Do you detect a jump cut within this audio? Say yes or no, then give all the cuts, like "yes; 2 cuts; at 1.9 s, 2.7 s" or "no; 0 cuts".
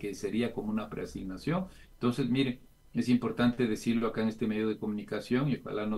no; 0 cuts